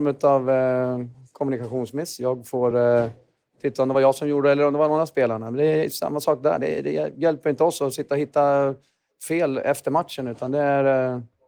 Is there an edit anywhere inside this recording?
no; 0 cuts

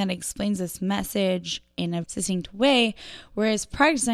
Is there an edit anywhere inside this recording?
yes; 1 cut; at 2.0 s

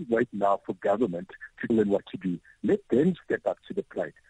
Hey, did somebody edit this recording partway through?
yes; 1 cut; at 1.7 s

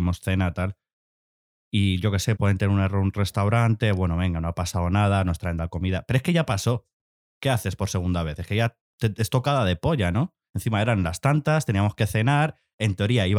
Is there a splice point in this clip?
yes; 2 cuts; at 2.4 s, 5.6 s

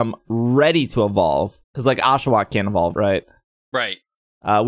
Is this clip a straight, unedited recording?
no; 2 cuts; at 1.6 s, 2.9 s

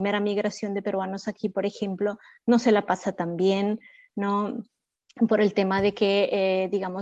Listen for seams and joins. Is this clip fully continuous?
yes; 0 cuts

